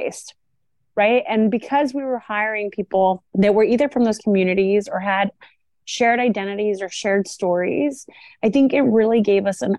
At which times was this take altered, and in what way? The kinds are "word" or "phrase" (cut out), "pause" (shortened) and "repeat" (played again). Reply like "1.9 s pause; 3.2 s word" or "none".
3.3 s pause